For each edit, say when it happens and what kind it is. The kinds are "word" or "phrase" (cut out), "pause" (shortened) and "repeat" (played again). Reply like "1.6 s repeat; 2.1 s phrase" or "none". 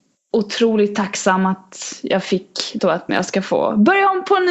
2.8 s phrase; 3.1 s word